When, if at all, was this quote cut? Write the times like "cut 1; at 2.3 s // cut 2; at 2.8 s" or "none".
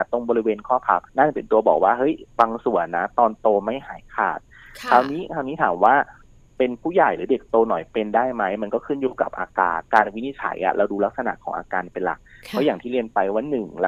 cut 1; at 1.1 s // cut 2; at 9.9 s